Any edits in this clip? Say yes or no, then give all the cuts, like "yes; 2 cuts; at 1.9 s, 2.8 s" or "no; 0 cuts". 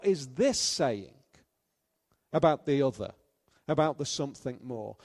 no; 0 cuts